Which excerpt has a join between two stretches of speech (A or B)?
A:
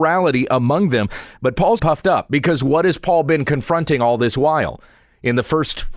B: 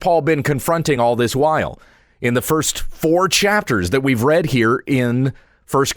A